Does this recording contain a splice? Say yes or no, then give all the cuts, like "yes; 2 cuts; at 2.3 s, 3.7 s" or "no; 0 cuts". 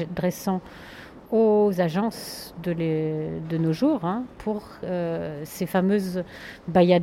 yes; 1 cut; at 1.2 s